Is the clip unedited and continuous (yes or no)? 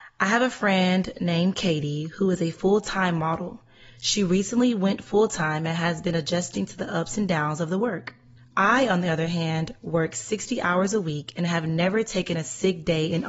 no